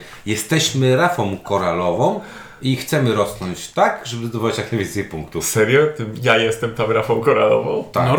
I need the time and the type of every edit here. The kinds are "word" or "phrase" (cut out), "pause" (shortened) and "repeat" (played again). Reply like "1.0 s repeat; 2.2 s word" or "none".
none